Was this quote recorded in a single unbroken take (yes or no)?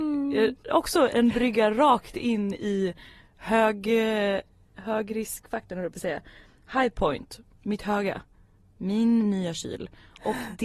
yes